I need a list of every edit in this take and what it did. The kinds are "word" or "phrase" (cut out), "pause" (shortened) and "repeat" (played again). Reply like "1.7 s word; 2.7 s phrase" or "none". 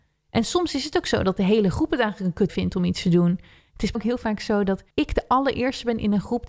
2.5 s word; 3.9 s word; 4.9 s pause